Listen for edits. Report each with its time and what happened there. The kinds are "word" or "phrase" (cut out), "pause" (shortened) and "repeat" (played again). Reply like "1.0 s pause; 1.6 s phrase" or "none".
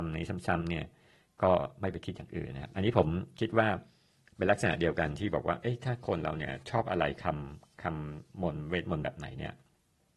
none